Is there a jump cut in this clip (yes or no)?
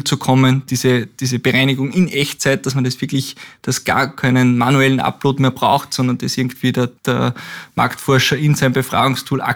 yes